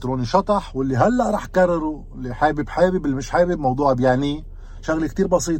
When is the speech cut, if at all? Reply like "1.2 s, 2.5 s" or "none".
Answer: none